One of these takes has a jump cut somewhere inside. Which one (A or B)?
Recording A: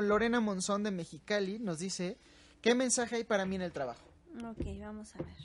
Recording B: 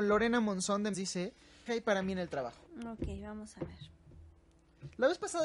B